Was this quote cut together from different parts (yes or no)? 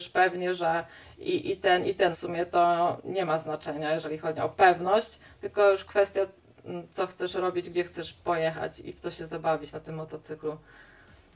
yes